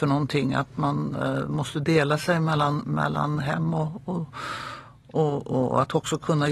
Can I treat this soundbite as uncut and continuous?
yes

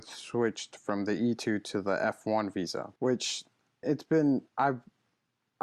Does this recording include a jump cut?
yes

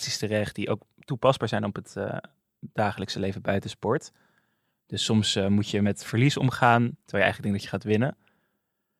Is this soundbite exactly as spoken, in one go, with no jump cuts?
no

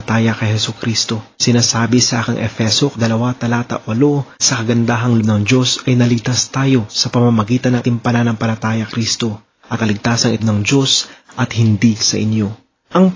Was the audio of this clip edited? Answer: yes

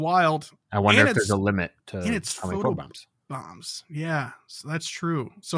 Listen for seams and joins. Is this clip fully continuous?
no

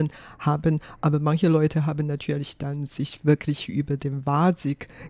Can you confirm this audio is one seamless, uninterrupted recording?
yes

